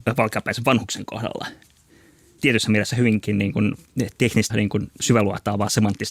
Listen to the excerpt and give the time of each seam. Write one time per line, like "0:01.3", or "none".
0:04.5